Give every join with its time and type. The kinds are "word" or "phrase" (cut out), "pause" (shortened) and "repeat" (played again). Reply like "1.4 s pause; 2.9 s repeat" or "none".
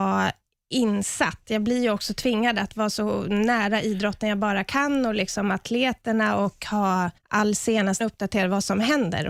7.2 s pause; 8.0 s word